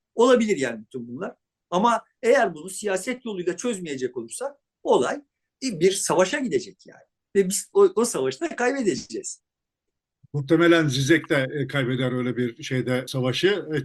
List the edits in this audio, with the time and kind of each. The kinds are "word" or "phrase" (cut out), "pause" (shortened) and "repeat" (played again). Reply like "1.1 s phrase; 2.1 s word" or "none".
5.5 s pause; 7.7 s word

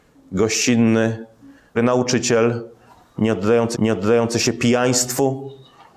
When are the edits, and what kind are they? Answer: 1.7 s word; 3.7 s repeat

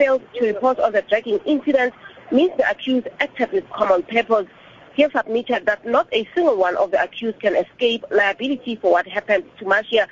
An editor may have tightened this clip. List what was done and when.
5.1 s word

